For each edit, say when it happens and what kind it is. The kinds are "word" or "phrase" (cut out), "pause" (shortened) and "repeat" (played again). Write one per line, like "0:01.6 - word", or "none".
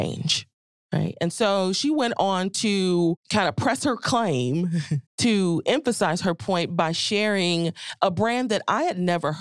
0:03.2 - pause
0:05.1 - pause